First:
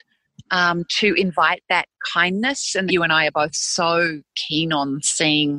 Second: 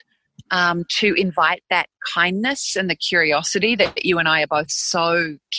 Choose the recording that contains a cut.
first; 1 cut; at 2.9 s

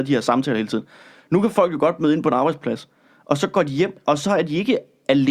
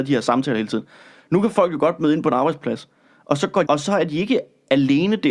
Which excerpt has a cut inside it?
second; 1 cut; at 3.6 s

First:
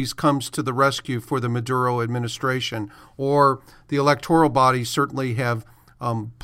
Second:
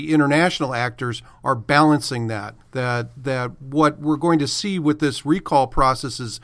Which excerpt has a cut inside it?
second; 1 cut; at 2.6 s

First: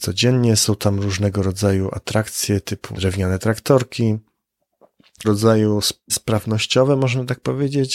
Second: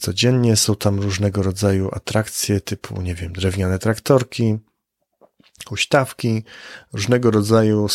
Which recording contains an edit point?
first; 3 cuts; at 2.9 s, 5.2 s, 6.1 s

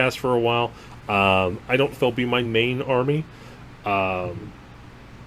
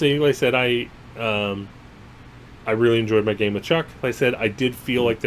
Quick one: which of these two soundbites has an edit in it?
first; 2 cuts; at 1.9 s, 2.4 s

